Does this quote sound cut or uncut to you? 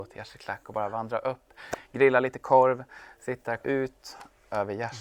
cut